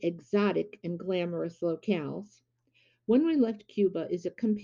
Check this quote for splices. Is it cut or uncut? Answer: uncut